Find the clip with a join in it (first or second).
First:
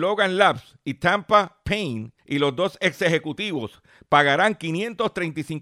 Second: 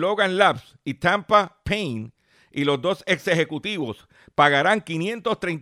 first